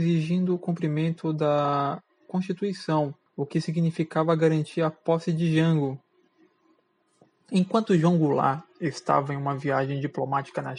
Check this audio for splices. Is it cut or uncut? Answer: cut